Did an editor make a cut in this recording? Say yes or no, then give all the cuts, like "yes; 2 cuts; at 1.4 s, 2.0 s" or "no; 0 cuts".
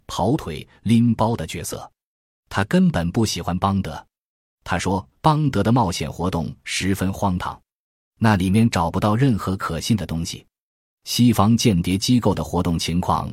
yes; 1 cut; at 5.1 s